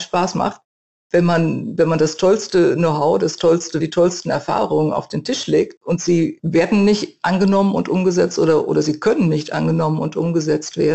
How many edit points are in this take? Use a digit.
1